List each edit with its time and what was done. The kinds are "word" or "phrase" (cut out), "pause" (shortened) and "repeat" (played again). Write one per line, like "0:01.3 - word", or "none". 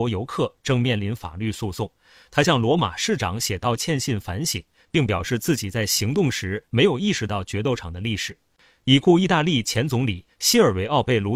none